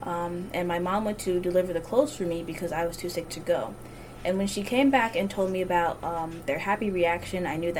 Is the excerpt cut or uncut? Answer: uncut